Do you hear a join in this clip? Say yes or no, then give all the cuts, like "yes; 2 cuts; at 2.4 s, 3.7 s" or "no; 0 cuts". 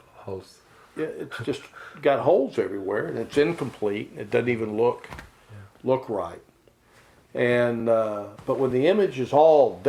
no; 0 cuts